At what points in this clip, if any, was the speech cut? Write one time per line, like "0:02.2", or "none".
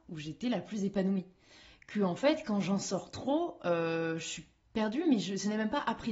none